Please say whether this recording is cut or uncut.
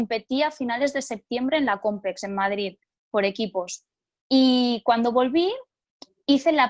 uncut